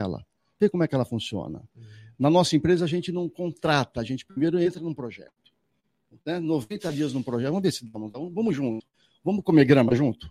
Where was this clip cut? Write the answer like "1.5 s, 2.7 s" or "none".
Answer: none